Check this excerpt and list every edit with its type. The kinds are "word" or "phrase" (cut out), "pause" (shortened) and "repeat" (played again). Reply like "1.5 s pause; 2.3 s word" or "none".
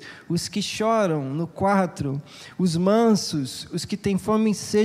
none